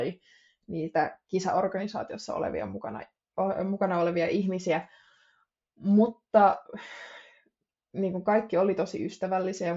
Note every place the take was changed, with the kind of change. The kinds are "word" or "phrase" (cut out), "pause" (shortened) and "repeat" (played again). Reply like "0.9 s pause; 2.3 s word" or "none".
none

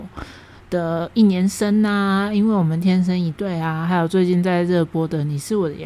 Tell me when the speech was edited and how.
none

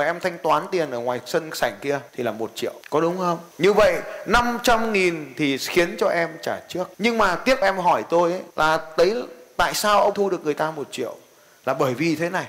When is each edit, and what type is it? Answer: 2.1 s pause; 6.9 s pause; 7.6 s word; 8.5 s pause; 10.1 s word

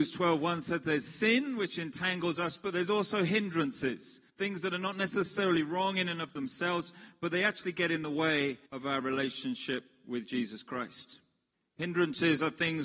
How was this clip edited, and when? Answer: 4.3 s pause; 8.7 s pause; 11.5 s pause

